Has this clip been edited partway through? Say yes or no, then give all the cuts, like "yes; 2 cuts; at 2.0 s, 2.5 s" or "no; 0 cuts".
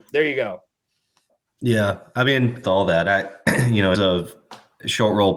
yes; 2 cuts; at 2.6 s, 3.9 s